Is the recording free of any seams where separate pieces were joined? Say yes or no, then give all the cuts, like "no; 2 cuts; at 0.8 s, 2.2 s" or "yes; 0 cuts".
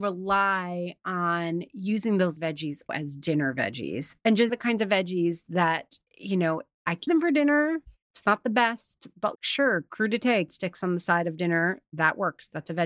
no; 8 cuts; at 2.4 s, 2.9 s, 4.5 s, 6.1 s, 7.1 s, 8.0 s, 9.3 s, 10.5 s